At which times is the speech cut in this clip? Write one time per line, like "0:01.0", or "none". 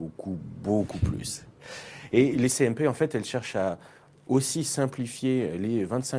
none